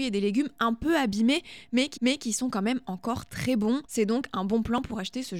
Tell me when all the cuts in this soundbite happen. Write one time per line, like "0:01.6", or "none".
0:02.0
0:03.8